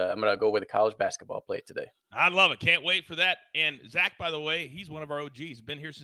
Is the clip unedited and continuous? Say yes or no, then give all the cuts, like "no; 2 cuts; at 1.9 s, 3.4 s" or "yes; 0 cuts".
no; 1 cut; at 2.0 s